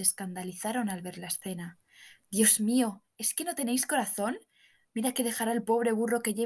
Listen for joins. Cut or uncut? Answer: uncut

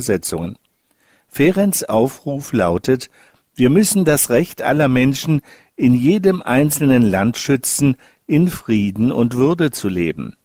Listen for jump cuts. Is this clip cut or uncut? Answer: uncut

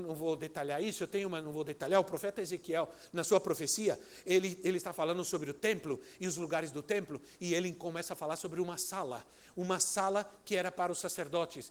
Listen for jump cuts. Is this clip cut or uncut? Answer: uncut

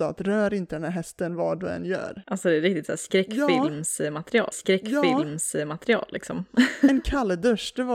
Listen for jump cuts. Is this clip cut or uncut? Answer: cut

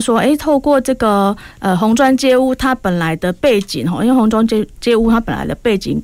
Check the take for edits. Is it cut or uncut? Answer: cut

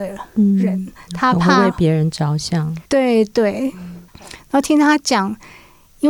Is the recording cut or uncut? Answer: cut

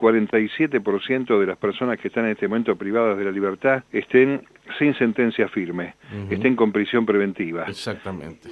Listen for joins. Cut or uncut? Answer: cut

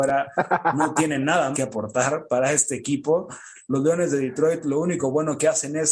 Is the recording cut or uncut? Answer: cut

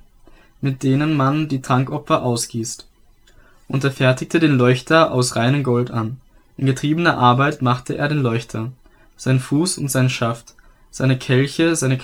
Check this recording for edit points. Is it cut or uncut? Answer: uncut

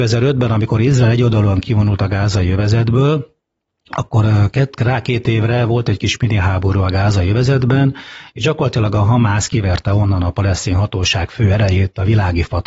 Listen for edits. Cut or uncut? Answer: uncut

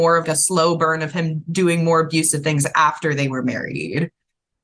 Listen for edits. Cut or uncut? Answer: uncut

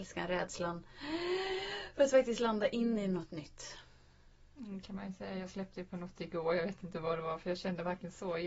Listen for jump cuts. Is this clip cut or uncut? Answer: uncut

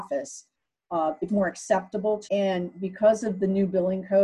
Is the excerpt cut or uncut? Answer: cut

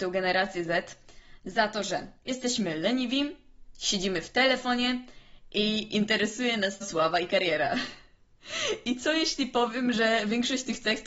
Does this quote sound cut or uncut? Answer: cut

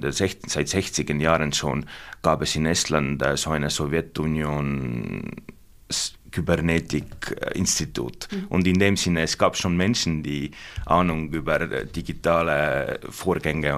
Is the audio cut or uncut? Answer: uncut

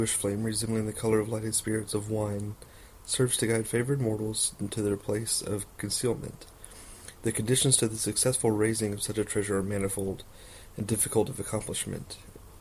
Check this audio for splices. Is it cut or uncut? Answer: uncut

